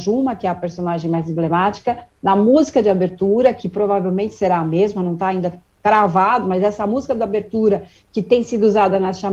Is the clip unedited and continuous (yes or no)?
yes